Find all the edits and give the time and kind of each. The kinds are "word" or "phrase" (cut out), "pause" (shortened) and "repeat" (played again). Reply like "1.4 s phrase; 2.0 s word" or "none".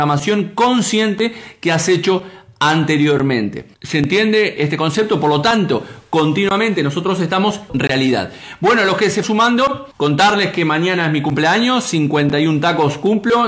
3.7 s pause; 4.6 s word; 7.7 s word; 9.2 s word; 9.9 s pause